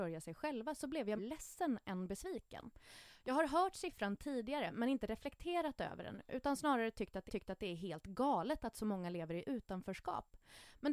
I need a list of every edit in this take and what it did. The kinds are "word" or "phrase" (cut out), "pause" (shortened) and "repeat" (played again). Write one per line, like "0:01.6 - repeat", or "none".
0:01.2 - word
0:07.3 - repeat

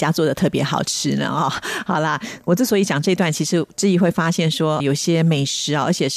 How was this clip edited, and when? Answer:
0:04.8 - word

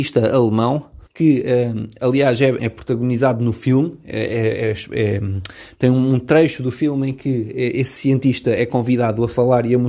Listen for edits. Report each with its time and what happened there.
0:01.1 - pause
0:02.6 - word

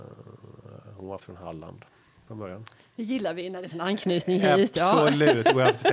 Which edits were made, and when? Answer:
0:01.2 - word
0:03.7 - word

